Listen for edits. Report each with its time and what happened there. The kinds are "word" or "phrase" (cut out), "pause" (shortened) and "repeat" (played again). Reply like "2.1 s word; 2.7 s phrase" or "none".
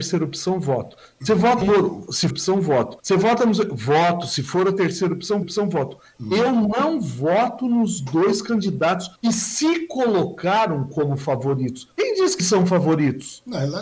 1.6 s word; 2.3 s phrase; 3.0 s pause; 5.4 s repeat; 9.2 s pause; 11.9 s pause; 12.4 s word